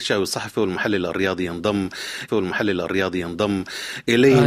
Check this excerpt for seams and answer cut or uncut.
cut